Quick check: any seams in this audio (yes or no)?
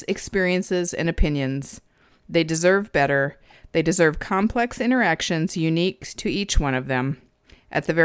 no